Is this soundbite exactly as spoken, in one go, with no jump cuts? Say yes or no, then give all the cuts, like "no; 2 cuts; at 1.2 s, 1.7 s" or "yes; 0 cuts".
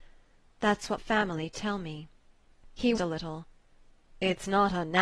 no; 2 cuts; at 1.0 s, 3.0 s